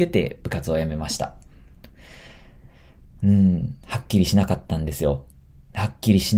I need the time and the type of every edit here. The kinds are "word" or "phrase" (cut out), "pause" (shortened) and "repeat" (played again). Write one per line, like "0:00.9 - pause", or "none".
0:03.8 - pause